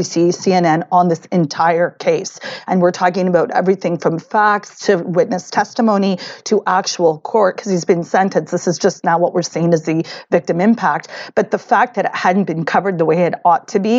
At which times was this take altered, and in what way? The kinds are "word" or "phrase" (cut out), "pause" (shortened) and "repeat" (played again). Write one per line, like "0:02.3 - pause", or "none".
none